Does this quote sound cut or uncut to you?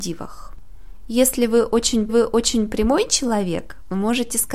cut